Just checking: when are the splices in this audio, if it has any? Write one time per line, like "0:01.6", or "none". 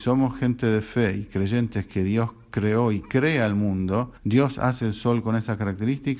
0:04.2